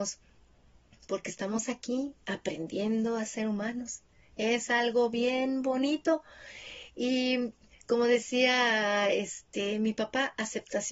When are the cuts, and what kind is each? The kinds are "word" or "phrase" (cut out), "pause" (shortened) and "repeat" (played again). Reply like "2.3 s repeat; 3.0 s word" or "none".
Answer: none